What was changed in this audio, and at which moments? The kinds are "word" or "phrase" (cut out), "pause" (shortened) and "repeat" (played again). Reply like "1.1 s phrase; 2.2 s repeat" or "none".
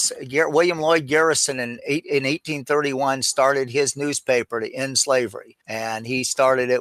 5.6 s pause